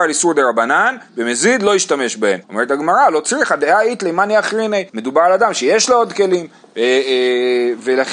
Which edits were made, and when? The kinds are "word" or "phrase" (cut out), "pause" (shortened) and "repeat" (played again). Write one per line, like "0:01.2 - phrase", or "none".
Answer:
0:02.4 - pause
0:04.9 - pause